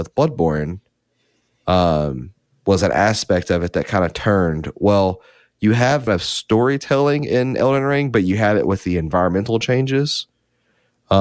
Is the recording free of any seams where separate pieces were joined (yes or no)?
no